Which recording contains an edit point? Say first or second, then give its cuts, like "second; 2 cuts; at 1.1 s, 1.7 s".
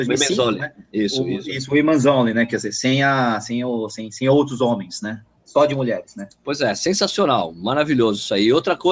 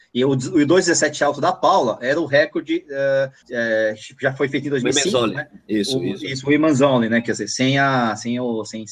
second; 1 cut; at 3.4 s